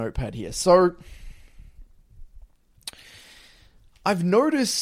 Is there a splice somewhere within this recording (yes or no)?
no